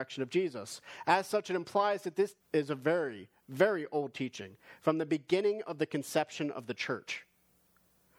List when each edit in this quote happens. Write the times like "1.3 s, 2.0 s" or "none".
2.4 s